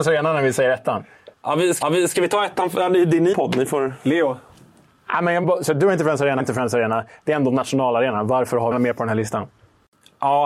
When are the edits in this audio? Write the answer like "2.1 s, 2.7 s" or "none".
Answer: 1.3 s, 1.8 s, 3.3 s, 5.4 s, 6.4 s, 8.7 s